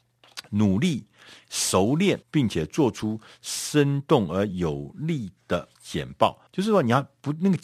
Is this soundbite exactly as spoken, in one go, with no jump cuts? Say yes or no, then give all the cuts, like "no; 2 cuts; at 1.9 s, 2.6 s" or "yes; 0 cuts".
no; 3 cuts; at 2.2 s, 5.7 s, 6.5 s